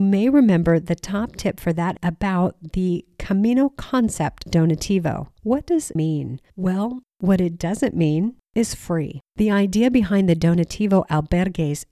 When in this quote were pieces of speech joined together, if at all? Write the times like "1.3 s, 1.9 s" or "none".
2.0 s, 4.5 s, 5.4 s, 6.0 s, 6.5 s, 9.3 s